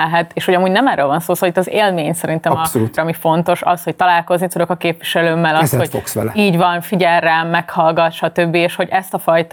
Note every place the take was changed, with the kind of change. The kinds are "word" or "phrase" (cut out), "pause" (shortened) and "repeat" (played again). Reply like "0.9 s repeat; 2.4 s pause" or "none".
3.0 s word